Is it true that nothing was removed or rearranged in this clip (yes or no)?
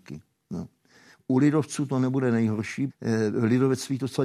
no